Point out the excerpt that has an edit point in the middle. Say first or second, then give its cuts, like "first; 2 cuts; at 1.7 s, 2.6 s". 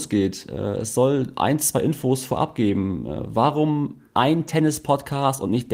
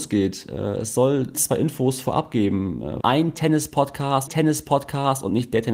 second; 3 cuts; at 1.3 s, 3.0 s, 4.3 s